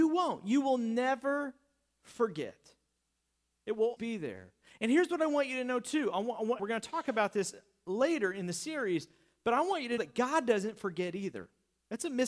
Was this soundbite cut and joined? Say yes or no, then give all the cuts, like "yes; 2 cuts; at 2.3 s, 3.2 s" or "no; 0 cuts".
yes; 3 cuts; at 4.0 s, 6.6 s, 10.0 s